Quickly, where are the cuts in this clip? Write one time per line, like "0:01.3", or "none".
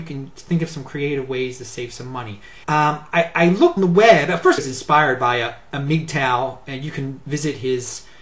0:02.6
0:03.8
0:04.6